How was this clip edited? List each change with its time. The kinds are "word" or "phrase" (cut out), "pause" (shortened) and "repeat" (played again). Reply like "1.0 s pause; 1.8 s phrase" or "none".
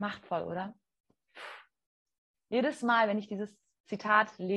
none